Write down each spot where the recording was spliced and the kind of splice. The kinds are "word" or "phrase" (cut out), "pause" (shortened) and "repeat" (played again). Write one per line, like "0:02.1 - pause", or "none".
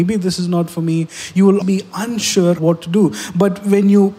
0:01.6 - word
0:02.6 - word